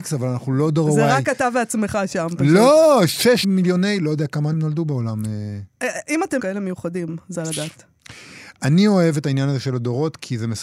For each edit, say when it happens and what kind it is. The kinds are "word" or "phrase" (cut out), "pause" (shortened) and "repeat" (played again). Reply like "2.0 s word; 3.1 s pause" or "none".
3.4 s phrase; 4.5 s word; 6.4 s phrase; 7.3 s phrase